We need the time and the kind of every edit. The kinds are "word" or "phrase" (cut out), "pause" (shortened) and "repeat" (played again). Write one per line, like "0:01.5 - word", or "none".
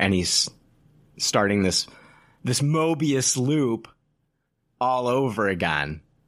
none